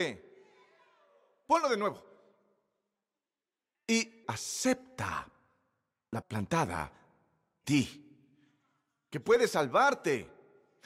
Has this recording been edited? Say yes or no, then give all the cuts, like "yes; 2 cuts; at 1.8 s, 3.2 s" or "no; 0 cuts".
yes; 3 cuts; at 4.2 s, 6.2 s, 7.6 s